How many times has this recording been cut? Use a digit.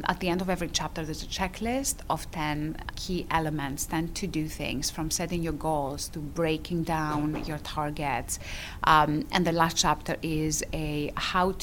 1